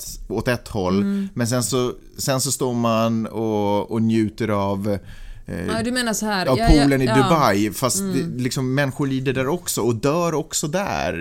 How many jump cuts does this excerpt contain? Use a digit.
0